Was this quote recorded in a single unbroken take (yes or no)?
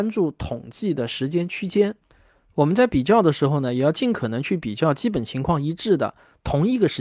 yes